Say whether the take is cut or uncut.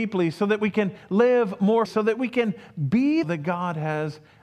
cut